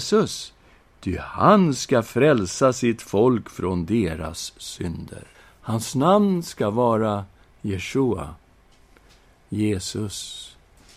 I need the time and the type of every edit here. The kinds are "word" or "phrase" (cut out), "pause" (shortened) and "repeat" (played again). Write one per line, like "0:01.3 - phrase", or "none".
0:05.3 - pause